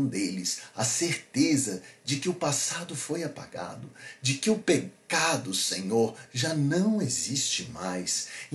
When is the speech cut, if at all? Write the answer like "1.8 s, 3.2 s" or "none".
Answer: none